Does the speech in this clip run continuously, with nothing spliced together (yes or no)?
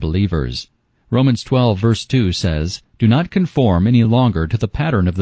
yes